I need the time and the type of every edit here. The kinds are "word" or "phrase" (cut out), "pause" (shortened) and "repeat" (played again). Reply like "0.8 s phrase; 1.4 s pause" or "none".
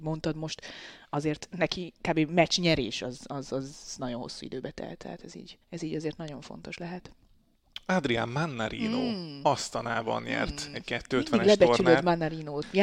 5.6 s pause